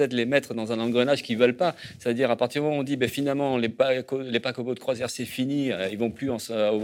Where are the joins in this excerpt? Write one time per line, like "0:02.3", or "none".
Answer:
none